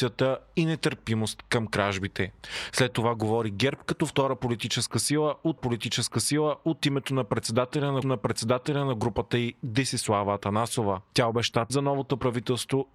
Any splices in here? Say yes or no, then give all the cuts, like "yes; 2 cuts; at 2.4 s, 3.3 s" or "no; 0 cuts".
yes; 3 cuts; at 5.6 s, 8.0 s, 11.7 s